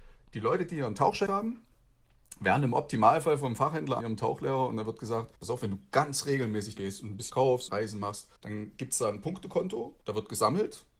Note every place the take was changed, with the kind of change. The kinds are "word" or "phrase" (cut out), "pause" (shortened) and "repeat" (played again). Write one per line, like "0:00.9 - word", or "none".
0:01.3 - word
0:04.0 - phrase
0:05.4 - pause
0:06.8 - word
0:07.3 - word
0:07.7 - word
0:08.4 - pause
0:10.0 - pause